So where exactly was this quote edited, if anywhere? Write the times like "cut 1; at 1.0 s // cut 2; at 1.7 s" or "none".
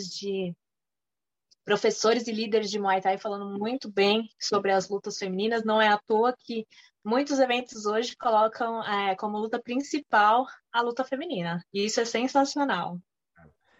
none